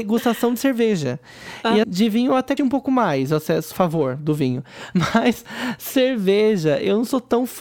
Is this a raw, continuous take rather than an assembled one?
no; 3 cuts; at 1.8 s, 2.6 s, 3.7 s

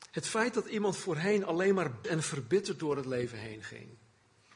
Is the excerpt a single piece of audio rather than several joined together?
no; 1 cut; at 2.0 s

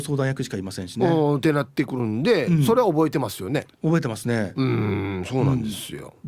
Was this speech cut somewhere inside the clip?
yes; 1 cut; at 3.7 s

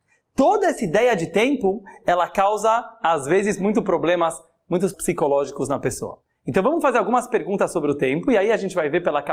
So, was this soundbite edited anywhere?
yes; 1 cut; at 4.9 s

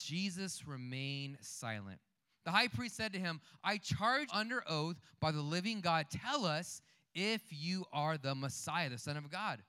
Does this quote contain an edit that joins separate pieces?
yes; 1 cut; at 4.3 s

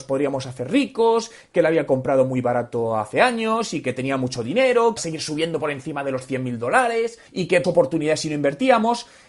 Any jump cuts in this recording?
yes; 3 cuts; at 5.0 s, 7.3 s, 7.6 s

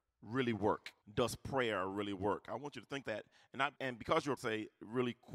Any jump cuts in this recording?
yes; 4 cuts; at 1.0 s, 3.0 s, 3.8 s, 4.4 s

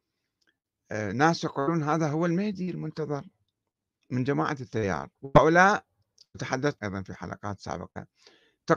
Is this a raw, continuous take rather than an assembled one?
no; 2 cuts; at 5.1 s, 6.8 s

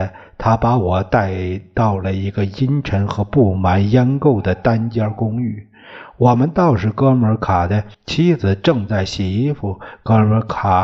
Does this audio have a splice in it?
yes; 1 cut; at 7.9 s

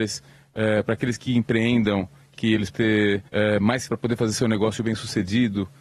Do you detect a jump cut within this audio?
yes; 5 cuts; at 1.2 s, 2.4 s, 2.7 s, 3.3 s, 3.9 s

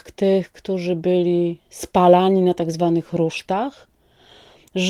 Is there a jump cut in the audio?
no; 0 cuts

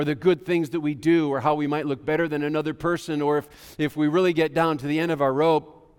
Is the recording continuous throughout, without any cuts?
yes; 0 cuts

